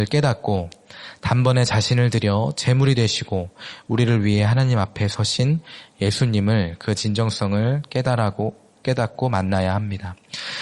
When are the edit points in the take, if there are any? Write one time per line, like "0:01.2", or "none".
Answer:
none